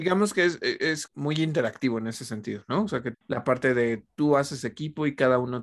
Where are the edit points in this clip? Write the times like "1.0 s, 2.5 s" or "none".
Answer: 1.1 s, 3.1 s